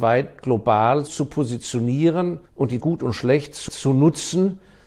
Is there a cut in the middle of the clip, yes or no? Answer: yes